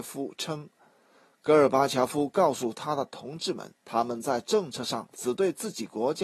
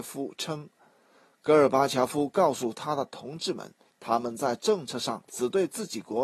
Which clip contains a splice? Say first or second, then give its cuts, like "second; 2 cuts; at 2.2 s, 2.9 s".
first; 1 cut; at 3.8 s